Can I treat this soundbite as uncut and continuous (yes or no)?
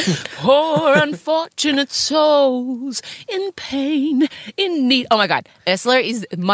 yes